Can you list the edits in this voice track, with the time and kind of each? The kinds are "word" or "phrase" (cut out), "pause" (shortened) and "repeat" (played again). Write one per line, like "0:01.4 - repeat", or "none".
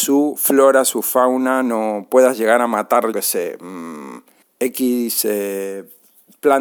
0:03.1 - word
0:04.4 - pause